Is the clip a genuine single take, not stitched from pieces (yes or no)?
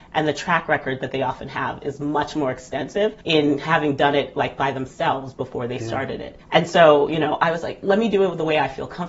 no